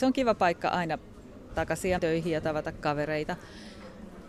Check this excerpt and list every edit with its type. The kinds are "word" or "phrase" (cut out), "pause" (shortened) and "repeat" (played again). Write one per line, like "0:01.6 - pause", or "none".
0:01.5 - word
0:02.0 - word